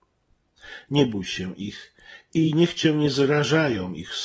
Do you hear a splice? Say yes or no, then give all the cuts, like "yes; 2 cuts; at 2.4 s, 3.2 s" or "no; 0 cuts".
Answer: no; 0 cuts